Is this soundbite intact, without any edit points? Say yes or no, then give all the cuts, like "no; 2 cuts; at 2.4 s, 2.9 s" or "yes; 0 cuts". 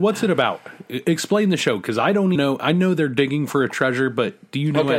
no; 1 cut; at 2.3 s